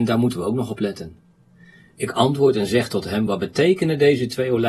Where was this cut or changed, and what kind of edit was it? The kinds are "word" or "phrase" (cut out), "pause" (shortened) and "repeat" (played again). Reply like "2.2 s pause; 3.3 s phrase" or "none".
none